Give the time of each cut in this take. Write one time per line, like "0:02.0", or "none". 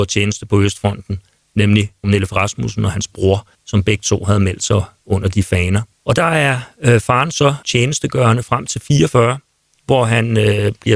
0:02.0
0:03.5
0:05.9
0:07.6